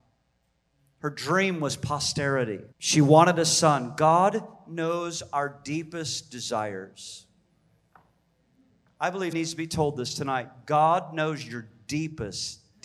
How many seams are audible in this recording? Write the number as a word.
two